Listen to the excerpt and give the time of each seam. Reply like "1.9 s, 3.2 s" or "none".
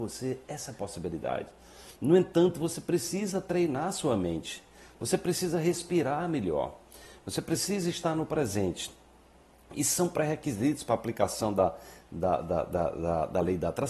none